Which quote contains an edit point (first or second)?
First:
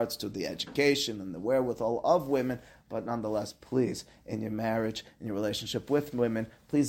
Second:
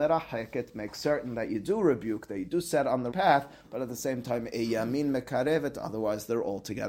second